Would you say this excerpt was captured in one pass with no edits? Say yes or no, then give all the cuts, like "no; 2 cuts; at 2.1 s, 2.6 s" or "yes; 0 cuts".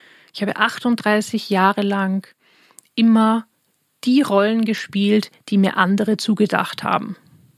yes; 0 cuts